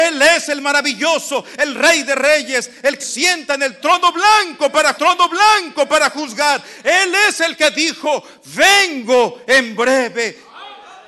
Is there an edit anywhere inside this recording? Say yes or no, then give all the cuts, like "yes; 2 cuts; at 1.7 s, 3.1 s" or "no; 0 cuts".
yes; 2 cuts; at 3.0 s, 5.0 s